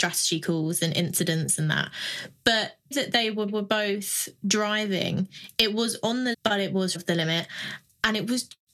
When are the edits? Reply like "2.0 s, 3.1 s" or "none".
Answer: 2.9 s, 3.5 s, 6.3 s, 6.9 s